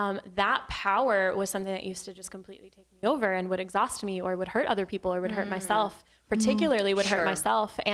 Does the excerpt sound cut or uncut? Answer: uncut